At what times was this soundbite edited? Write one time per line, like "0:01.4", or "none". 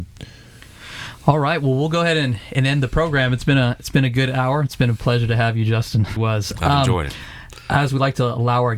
0:06.2
0:07.9